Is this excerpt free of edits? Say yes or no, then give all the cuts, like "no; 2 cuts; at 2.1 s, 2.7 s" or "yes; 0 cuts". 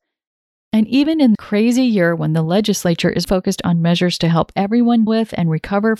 no; 3 cuts; at 1.3 s, 3.2 s, 5.1 s